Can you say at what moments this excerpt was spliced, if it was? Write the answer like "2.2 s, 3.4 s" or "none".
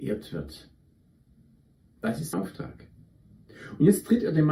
2.3 s